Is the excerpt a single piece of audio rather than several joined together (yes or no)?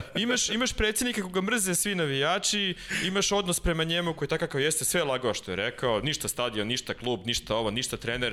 yes